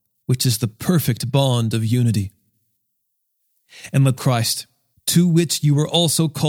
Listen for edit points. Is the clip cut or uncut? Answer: cut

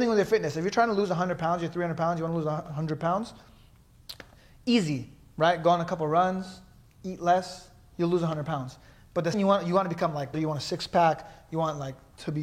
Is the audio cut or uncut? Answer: cut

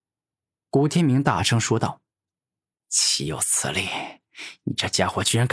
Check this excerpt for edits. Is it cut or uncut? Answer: cut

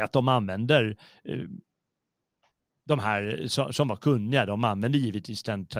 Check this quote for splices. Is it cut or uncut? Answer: uncut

